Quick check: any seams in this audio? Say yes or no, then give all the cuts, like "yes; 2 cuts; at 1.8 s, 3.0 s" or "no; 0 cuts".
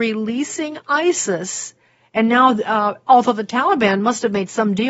no; 0 cuts